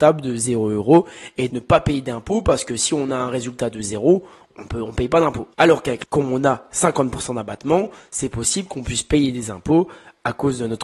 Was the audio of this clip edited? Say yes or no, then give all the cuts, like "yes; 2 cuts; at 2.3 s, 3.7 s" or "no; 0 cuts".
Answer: yes; 3 cuts; at 1.5 s, 5.5 s, 6.0 s